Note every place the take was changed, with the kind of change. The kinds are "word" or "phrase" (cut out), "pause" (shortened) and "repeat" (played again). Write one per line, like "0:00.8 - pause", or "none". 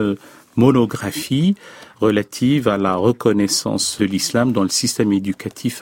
0:04.0 - word